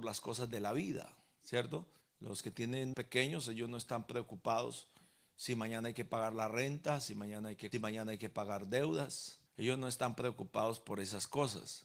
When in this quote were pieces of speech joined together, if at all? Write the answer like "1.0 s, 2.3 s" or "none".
2.0 s, 2.9 s, 7.7 s, 9.5 s